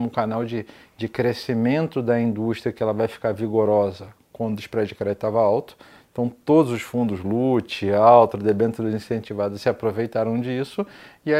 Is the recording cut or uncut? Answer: uncut